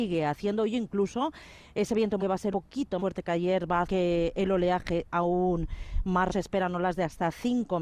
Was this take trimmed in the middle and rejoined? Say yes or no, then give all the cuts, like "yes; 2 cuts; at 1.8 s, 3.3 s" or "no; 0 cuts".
yes; 6 cuts; at 2.2 s, 2.5 s, 3.0 s, 3.8 s, 5.1 s, 6.3 s